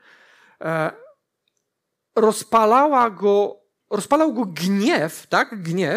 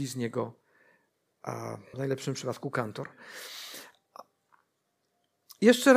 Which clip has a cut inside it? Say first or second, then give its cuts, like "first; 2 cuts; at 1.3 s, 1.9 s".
second; 1 cut; at 1.9 s